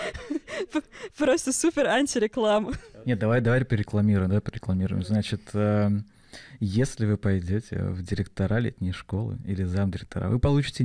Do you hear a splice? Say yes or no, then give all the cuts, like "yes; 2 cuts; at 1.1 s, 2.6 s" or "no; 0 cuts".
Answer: no; 0 cuts